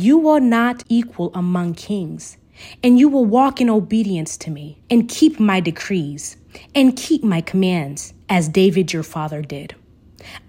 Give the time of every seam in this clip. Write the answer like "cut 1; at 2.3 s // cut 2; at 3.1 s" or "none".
cut 1; at 4.8 s

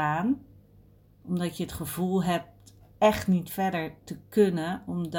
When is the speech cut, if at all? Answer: none

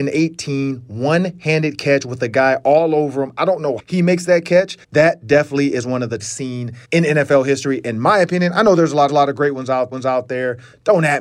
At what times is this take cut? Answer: cut 1; at 3.8 s // cut 2; at 4.8 s // cut 3; at 6.2 s // cut 4; at 6.8 s // cut 5; at 9.1 s // cut 6; at 9.9 s

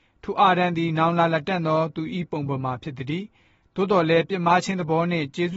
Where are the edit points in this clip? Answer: none

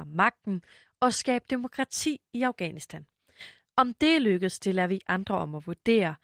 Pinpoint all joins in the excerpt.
none

